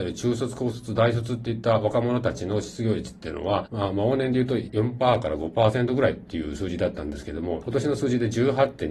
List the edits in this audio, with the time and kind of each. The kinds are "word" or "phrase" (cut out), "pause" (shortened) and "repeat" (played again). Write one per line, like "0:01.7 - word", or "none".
none